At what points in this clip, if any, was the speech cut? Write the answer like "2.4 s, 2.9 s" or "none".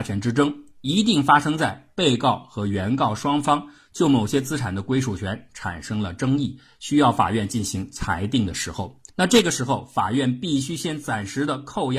9.1 s